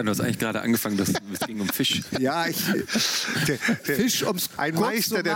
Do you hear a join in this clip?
no; 0 cuts

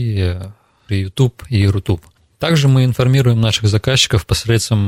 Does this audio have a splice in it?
no; 0 cuts

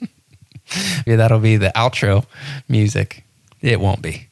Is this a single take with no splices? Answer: no; 1 cut; at 1.1 s

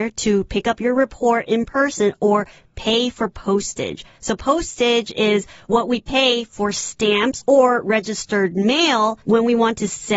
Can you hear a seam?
no; 0 cuts

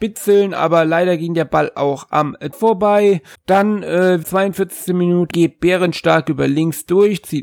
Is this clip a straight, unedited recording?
no; 4 cuts; at 2.5 s, 3.3 s, 4.2 s, 5.3 s

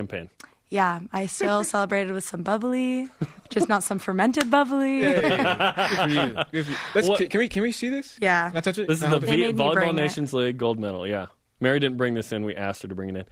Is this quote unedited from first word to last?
yes; 0 cuts

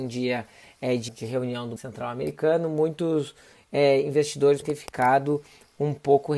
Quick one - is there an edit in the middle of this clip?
yes; 3 cuts; at 1.1 s, 1.8 s, 4.6 s

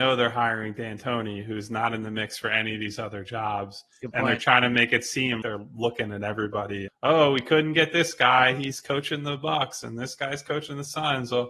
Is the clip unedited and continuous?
no; 2 cuts; at 5.4 s, 6.9 s

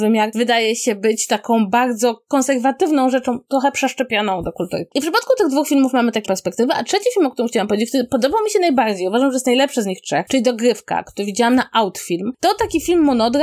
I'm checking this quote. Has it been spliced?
yes; 1 cut; at 6.3 s

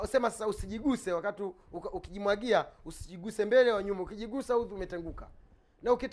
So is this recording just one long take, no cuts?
yes; 0 cuts

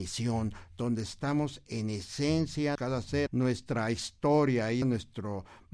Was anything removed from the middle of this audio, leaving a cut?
yes; 3 cuts; at 2.7 s, 3.3 s, 4.8 s

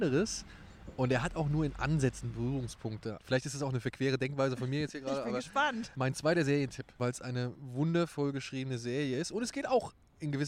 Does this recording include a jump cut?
no; 0 cuts

